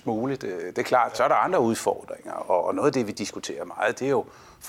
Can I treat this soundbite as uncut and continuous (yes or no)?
yes